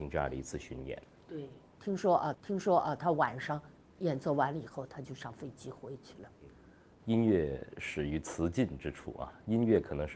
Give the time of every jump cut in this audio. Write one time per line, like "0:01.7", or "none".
0:02.3